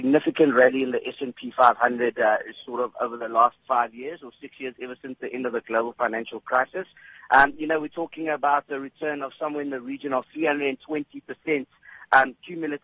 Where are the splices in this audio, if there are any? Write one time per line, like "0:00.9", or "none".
none